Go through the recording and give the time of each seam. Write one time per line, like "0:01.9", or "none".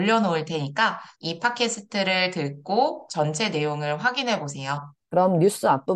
0:01.1
0:05.0